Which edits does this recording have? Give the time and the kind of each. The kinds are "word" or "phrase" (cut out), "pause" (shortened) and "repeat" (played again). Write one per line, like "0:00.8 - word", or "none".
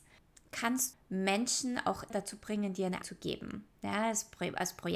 0:00.9 - word
0:02.1 - word
0:03.0 - word